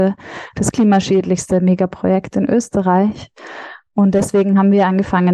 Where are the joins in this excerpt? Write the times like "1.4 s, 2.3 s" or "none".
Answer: none